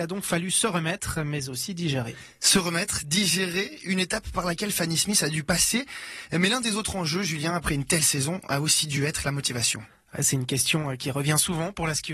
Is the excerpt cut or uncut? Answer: uncut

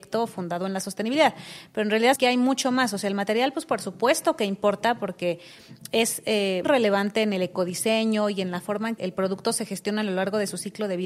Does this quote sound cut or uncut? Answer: cut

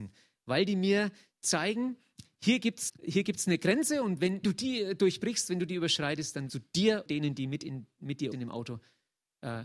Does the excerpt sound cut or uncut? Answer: cut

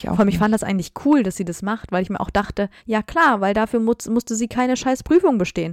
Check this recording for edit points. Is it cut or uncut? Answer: cut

